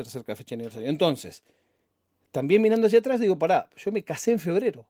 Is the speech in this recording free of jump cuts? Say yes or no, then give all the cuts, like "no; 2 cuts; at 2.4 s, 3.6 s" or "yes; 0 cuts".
yes; 0 cuts